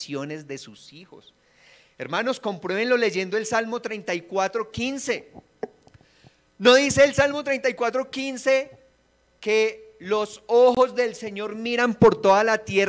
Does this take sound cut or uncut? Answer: uncut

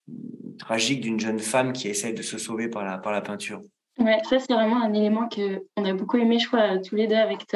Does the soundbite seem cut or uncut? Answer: uncut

